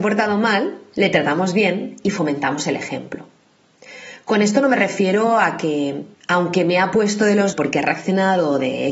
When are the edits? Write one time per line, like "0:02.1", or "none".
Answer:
0:07.5